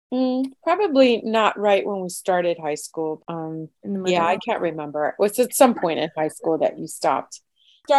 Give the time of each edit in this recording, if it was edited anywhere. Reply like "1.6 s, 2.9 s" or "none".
3.2 s, 3.8 s